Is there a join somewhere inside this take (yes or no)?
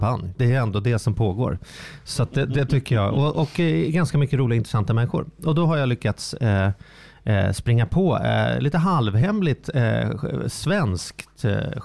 no